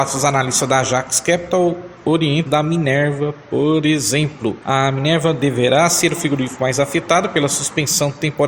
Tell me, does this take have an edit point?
yes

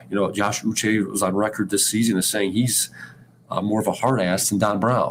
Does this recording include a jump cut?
no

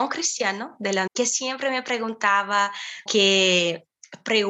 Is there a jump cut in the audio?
yes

